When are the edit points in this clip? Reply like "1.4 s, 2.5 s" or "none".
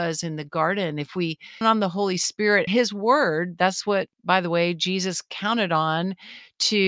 1.6 s, 2.7 s, 4.1 s